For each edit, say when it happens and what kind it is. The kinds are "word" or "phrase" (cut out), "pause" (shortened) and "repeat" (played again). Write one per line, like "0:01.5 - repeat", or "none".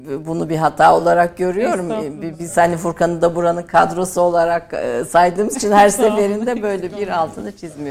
none